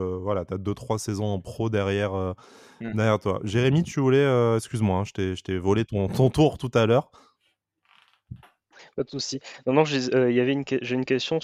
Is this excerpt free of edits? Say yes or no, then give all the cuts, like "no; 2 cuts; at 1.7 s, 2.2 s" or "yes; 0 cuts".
yes; 0 cuts